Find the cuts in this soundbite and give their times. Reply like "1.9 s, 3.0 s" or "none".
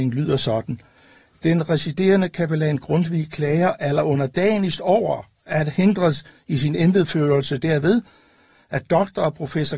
none